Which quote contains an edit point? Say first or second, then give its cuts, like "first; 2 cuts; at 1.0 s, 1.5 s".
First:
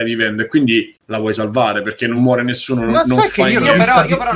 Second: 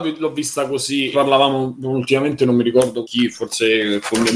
second; 2 cuts; at 1.1 s, 3.0 s